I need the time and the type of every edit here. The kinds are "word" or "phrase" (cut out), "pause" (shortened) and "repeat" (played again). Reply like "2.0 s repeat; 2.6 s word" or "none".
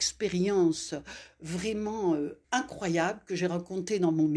2.4 s pause